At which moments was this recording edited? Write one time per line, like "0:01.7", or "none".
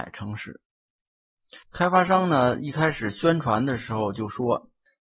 0:01.6